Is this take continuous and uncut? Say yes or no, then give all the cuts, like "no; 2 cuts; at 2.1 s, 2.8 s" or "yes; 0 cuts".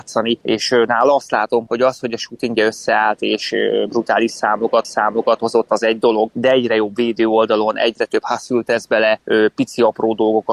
no; 2 cuts; at 1.7 s, 4.8 s